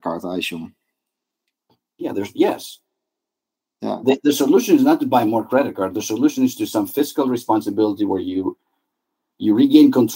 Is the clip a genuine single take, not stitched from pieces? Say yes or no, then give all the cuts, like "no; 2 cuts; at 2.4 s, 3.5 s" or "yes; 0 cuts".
yes; 0 cuts